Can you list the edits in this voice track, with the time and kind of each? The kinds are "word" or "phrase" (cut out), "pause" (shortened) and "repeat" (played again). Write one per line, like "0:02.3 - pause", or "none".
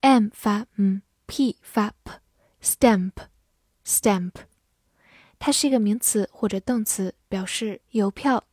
none

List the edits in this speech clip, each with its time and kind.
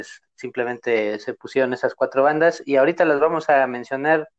none

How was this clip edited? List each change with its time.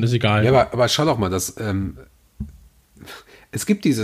none

